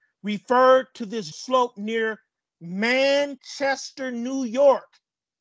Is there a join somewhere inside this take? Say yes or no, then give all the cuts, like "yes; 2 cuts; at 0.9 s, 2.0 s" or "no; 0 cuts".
yes; 1 cut; at 1.3 s